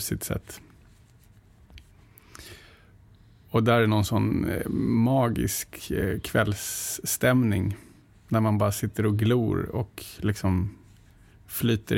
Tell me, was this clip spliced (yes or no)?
no